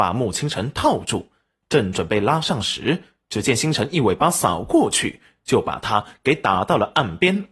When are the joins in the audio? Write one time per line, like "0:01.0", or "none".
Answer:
none